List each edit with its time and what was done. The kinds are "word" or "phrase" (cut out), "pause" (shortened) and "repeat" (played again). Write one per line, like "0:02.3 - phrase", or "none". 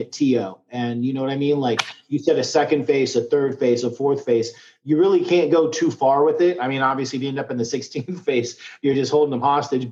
none